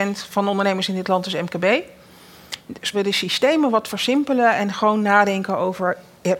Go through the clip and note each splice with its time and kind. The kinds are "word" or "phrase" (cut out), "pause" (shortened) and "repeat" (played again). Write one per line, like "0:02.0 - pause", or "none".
0:02.9 - phrase